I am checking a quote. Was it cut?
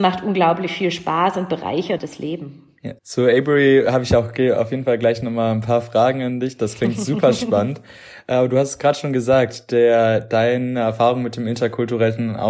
yes; 2 cuts; at 2.0 s, 3.0 s

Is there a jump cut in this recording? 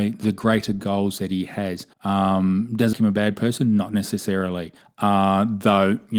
yes; 3 cuts; at 1.9 s, 2.9 s, 4.8 s

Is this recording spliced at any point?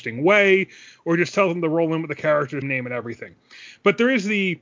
yes; 1 cut; at 2.6 s

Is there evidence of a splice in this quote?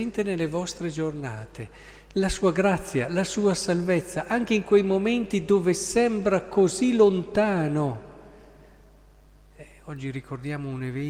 no; 0 cuts

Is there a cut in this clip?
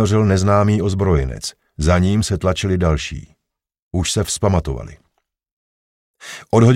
no; 0 cuts

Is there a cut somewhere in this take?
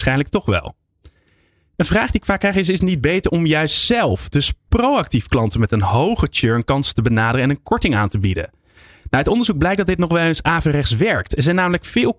no; 0 cuts

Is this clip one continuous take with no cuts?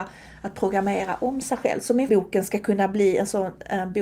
no; 1 cut; at 2.1 s

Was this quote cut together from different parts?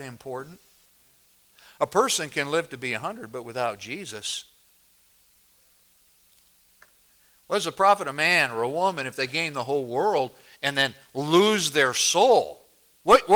no; 0 cuts

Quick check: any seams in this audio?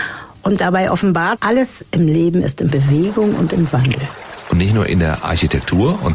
yes; 2 cuts; at 1.4 s, 2.7 s

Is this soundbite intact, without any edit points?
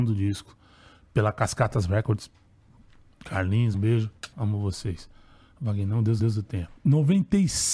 no; 4 cuts; at 3.7 s, 4.3 s, 6.2 s, 6.8 s

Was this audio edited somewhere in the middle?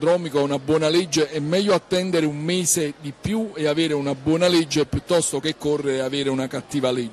no; 0 cuts

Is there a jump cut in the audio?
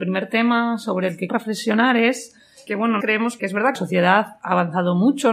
yes; 5 cuts; at 1.3 s, 2.7 s, 3.0 s, 3.4 s, 3.7 s

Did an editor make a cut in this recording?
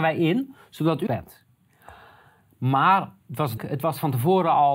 yes; 2 cuts; at 1.1 s, 3.6 s

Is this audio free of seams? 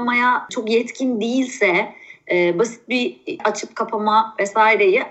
no; 1 cut; at 3.4 s

